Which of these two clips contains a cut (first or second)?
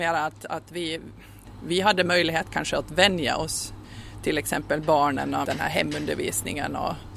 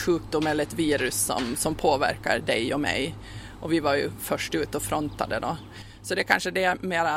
first